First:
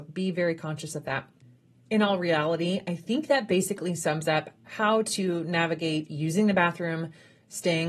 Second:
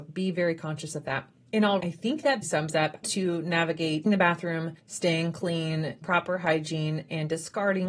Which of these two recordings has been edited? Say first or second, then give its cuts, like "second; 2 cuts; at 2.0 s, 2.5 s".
second; 7 cuts; at 1.4 s, 1.8 s, 2.4 s, 3.0 s, 4.1 s, 4.8 s, 6.0 s